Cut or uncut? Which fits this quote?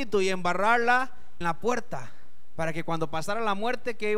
cut